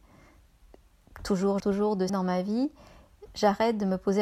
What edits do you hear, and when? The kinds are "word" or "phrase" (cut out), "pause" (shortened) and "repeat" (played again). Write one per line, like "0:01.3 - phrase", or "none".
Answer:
0:01.6 - word
0:02.1 - phrase